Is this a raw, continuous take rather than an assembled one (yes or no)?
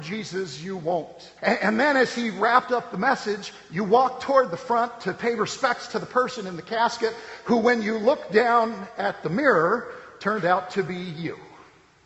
no